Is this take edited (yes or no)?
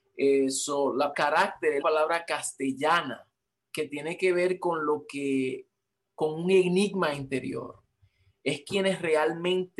yes